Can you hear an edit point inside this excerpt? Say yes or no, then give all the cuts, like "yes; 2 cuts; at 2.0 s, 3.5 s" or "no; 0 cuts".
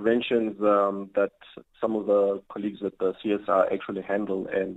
no; 0 cuts